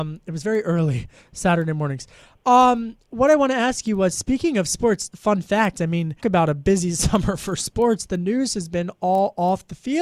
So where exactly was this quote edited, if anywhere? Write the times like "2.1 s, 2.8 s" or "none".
5.1 s, 6.2 s